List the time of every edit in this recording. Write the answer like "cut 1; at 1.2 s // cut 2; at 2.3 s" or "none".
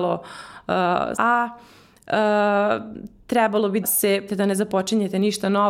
cut 1; at 1.1 s // cut 2; at 3.8 s // cut 3; at 4.3 s